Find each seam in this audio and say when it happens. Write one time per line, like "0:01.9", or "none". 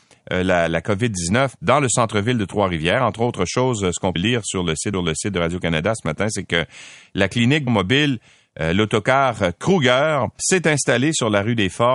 0:01.6
0:04.2
0:04.9
0:07.7
0:10.4